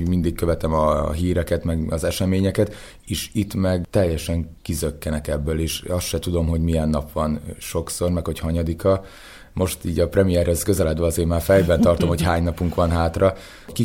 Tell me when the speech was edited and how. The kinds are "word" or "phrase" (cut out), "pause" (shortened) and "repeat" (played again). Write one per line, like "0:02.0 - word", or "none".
0:04.6 - pause